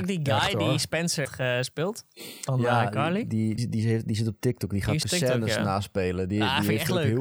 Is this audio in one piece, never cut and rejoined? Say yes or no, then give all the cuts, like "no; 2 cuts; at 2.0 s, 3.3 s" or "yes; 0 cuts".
no; 3 cuts; at 1.2 s, 3.6 s, 5.0 s